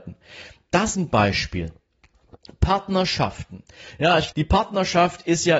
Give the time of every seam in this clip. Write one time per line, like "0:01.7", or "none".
0:00.9
0:04.3